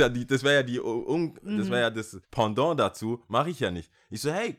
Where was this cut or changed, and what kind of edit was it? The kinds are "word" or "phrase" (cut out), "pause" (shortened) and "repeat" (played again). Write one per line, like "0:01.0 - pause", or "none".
0:02.2 - pause